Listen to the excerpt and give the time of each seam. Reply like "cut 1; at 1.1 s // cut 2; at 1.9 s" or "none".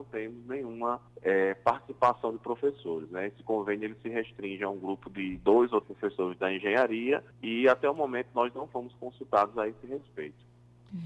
cut 1; at 1.1 s // cut 2; at 5.8 s // cut 3; at 7.3 s